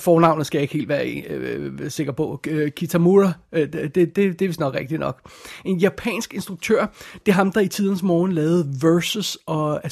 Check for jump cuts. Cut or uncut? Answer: uncut